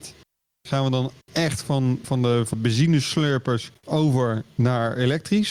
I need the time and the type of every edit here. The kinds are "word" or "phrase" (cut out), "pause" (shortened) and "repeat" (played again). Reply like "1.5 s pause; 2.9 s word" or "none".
1.2 s pause; 2.0 s word; 2.5 s word; 3.7 s pause